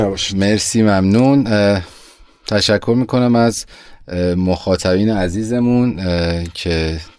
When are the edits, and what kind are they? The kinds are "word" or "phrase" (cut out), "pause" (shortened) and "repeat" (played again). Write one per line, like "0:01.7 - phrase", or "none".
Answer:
none